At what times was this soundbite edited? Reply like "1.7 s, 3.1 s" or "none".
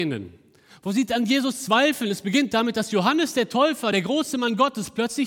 none